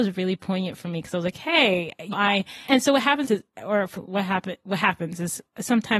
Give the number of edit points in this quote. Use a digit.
4